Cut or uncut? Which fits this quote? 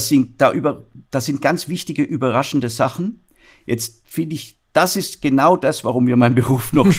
uncut